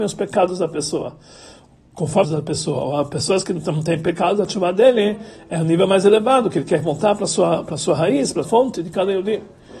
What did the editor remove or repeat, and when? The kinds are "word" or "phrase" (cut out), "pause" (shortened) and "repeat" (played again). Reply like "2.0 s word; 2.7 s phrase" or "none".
2.2 s phrase; 8.4 s word